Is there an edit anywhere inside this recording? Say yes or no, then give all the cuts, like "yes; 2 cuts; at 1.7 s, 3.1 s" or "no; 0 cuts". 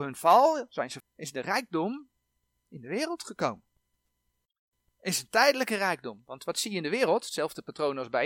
yes; 1 cut; at 1.0 s